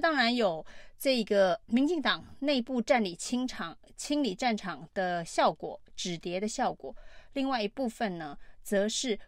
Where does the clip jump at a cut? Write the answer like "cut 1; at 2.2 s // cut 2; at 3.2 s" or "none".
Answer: cut 1; at 1.6 s